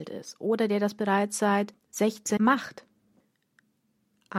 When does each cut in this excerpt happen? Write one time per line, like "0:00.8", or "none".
0:02.4